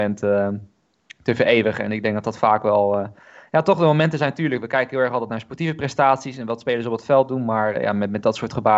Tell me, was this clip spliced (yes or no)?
yes